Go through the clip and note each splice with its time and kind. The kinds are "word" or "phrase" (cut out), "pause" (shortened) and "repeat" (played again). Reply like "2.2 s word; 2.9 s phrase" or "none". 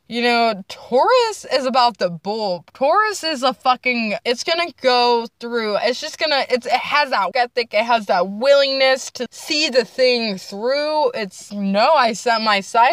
4.2 s word; 7.3 s word; 9.3 s word; 11.5 s word